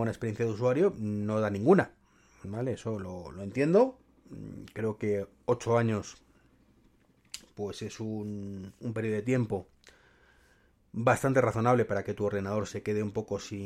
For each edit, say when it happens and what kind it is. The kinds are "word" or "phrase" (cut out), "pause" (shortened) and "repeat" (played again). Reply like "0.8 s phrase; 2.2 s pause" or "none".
none

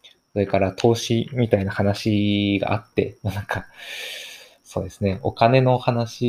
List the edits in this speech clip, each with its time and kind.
none

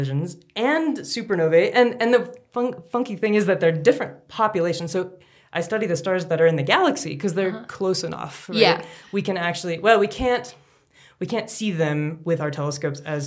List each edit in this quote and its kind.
none

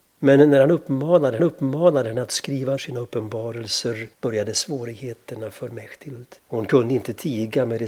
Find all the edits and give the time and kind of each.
1.4 s repeat; 2.8 s word; 4.1 s pause; 6.4 s pause

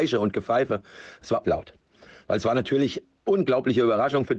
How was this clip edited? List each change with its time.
1.4 s word; 3.1 s word

